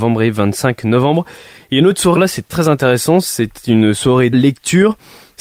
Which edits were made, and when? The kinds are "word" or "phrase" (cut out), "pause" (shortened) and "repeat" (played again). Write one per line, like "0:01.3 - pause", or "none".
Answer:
0:02.2 - word
0:02.5 - word
0:04.3 - word

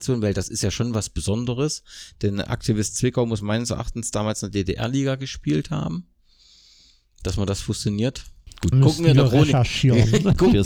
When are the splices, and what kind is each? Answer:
0:08.7 - word

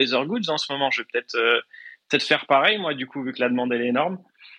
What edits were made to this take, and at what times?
none

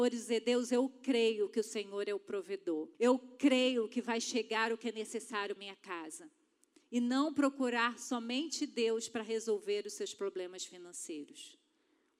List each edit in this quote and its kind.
0:02.9 - pause
0:05.6 - word

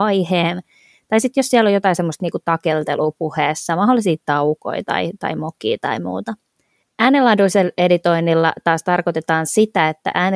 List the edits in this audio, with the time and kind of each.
none

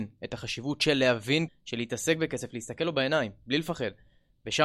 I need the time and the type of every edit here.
0:01.5 - word

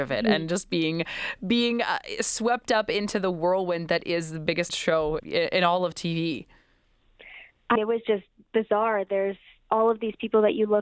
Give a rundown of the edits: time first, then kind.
0:04.7 - word
0:05.2 - word
0:07.8 - word
0:09.6 - word

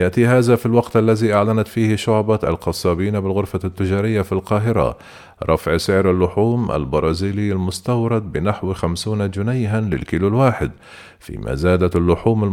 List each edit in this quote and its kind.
none

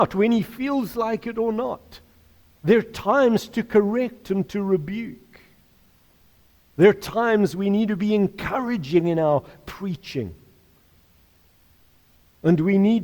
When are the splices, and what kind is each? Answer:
none

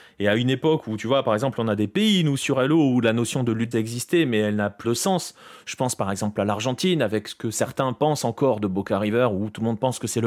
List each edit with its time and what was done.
0:03.7 - phrase
0:04.8 - word

